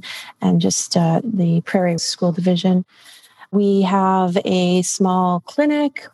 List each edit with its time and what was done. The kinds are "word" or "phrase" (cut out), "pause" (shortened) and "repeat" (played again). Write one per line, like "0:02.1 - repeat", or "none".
0:01.2 - word
0:02.0 - word

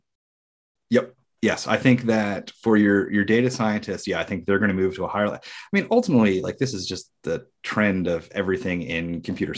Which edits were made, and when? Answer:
none

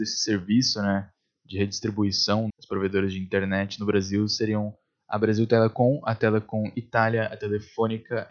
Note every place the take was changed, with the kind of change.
0:02.5 - word

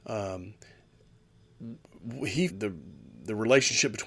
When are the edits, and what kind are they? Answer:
0:02.5 - phrase

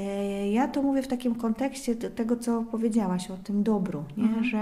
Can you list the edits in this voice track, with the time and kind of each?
none

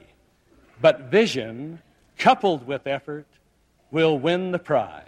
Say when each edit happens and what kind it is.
none

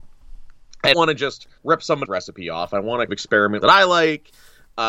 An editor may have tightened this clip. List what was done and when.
0:00.9 - word
0:01.6 - pause
0:02.1 - word
0:03.1 - phrase
0:03.6 - phrase

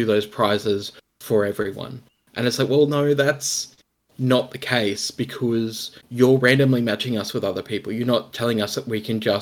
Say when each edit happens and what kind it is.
0:06.0 - pause

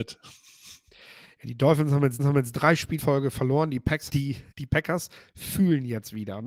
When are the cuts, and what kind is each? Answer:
0:02.2 - repeat
0:03.0 - word
0:04.1 - word
0:04.5 - pause

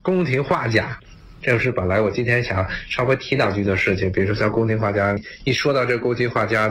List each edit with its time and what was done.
0:01.4 - phrase

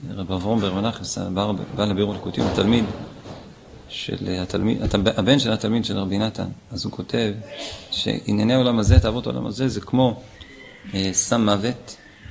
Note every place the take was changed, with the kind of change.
none

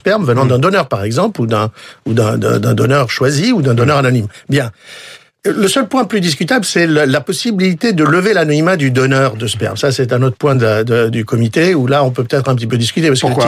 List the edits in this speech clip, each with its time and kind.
none

